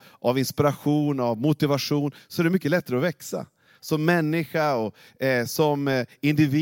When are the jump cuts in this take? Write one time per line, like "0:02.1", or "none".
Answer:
none